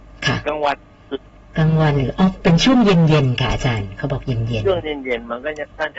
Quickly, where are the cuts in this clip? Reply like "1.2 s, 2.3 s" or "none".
1.4 s

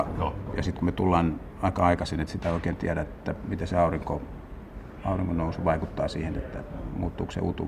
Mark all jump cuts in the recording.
none

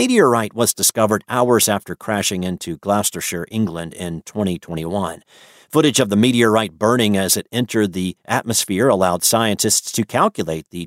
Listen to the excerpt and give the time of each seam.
none

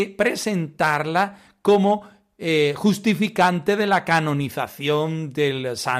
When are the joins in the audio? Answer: none

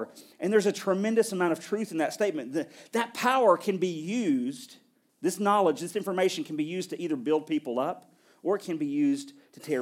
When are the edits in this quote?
none

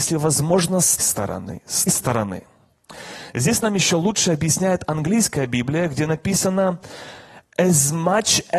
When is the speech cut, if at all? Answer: 1.0 s, 1.9 s

